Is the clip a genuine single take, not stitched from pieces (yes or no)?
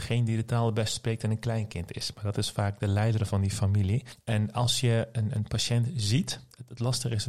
yes